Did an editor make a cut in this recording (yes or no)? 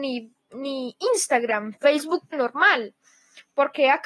yes